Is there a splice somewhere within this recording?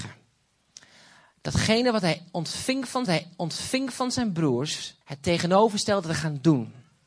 yes; 2 cuts; at 3.1 s, 5.0 s

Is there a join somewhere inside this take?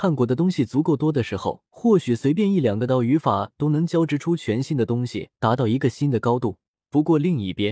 yes; 3 cuts; at 1.7 s, 5.3 s, 6.7 s

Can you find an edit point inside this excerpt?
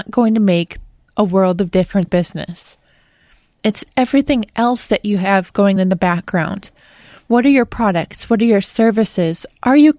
yes; 2 cuts; at 2.1 s, 5.8 s

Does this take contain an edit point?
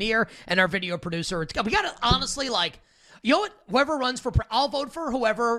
no; 0 cuts

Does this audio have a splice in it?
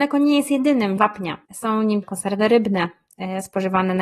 yes; 3 cuts; at 1.0 s, 1.5 s, 2.0 s

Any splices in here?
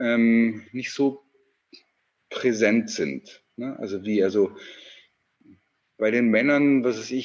no; 0 cuts

